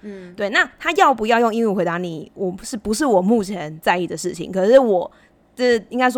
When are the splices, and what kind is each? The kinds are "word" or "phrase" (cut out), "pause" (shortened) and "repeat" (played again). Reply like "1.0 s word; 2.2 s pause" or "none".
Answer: none